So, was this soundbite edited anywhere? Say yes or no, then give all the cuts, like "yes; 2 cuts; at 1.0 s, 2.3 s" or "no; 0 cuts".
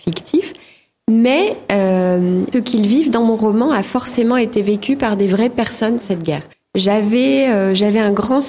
yes; 3 cuts; at 2.5 s, 6.0 s, 6.5 s